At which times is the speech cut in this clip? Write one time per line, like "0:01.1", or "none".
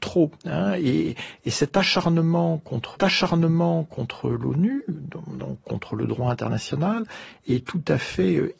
0:03.0